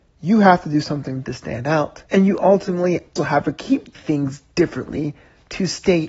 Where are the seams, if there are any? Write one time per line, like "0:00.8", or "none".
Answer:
0:01.2
0:02.1
0:03.2
0:03.9